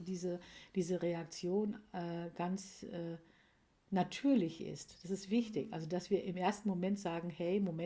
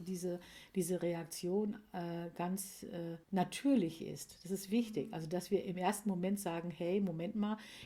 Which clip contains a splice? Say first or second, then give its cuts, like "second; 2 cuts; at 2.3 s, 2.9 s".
second; 1 cut; at 3.2 s